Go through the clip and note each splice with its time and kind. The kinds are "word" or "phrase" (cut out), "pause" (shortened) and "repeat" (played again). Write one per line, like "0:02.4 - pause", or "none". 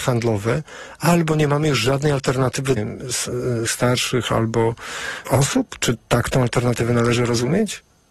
0:02.8 - phrase
0:03.7 - word
0:05.2 - phrase